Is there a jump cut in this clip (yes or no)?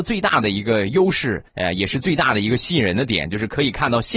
yes